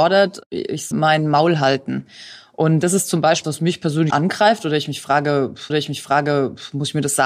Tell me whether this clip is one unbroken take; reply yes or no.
no